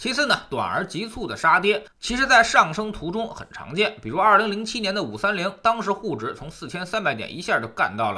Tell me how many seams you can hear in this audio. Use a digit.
1